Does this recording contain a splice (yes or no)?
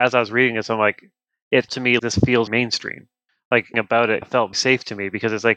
yes